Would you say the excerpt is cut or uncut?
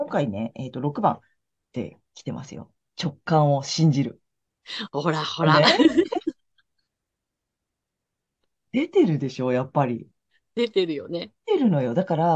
uncut